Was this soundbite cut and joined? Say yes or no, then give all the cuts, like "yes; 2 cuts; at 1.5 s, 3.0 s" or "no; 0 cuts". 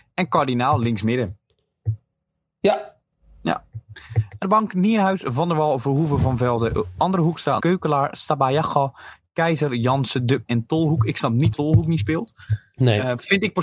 yes; 4 cuts; at 4.4 s, 7.6 s, 10.5 s, 11.5 s